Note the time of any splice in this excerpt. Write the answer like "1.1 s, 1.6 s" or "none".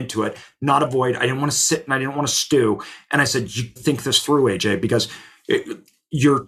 3.8 s

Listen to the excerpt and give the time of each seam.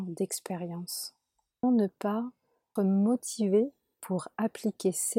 1.6 s, 2.8 s

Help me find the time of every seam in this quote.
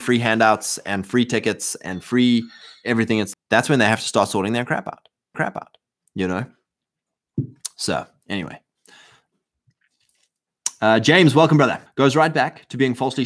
3.3 s, 5.3 s, 11.9 s

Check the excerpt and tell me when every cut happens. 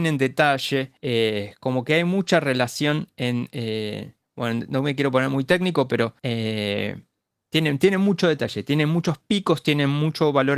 1.0 s, 6.2 s

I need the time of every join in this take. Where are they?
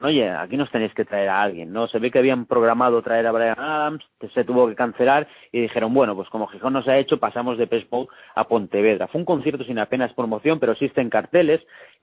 none

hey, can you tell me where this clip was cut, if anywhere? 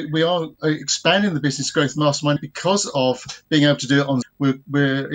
2.4 s, 4.2 s

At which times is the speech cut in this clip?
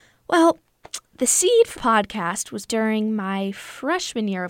1.8 s, 2.7 s

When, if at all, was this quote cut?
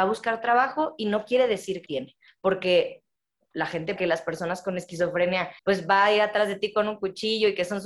1.9 s, 2.3 s, 4.0 s, 5.6 s

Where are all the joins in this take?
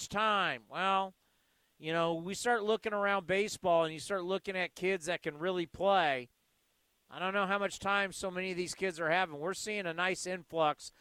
none

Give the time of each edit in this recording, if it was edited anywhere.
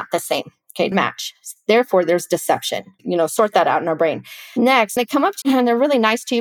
0.9 s, 5.0 s, 5.4 s

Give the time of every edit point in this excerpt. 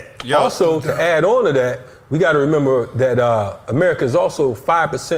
none

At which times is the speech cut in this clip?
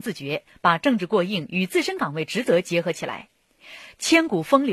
none

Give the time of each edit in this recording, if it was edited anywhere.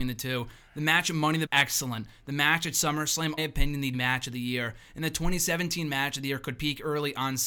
1.5 s, 3.4 s, 3.9 s

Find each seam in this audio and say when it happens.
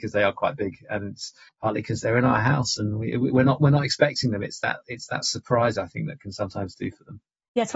1.5 s

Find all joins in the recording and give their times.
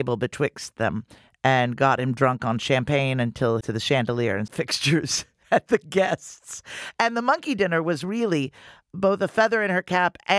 1.2 s, 3.6 s, 4.5 s

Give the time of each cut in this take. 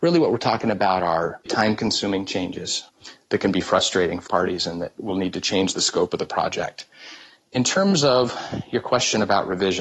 1.5 s, 4.3 s

